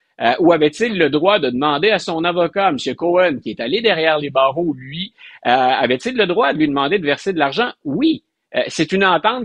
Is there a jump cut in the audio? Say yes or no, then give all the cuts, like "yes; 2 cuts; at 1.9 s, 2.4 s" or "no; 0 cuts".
no; 0 cuts